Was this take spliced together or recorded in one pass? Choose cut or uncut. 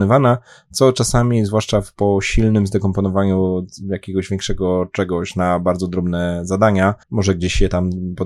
cut